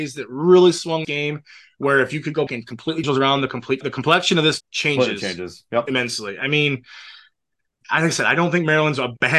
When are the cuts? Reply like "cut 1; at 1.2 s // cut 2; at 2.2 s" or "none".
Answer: cut 1; at 1.0 s // cut 2; at 2.5 s // cut 3; at 3.0 s // cut 4; at 3.8 s // cut 5; at 4.6 s // cut 6; at 7.8 s